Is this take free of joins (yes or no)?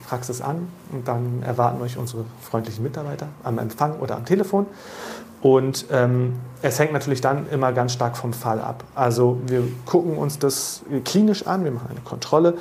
yes